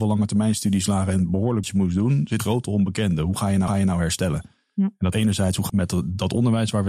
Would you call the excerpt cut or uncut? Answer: cut